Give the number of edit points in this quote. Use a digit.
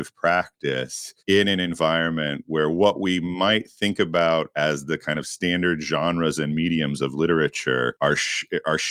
1